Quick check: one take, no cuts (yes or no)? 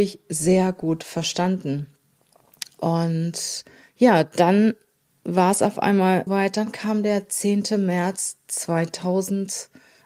no